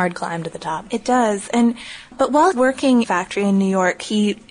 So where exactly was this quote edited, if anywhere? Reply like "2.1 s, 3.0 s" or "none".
2.1 s, 2.5 s, 3.0 s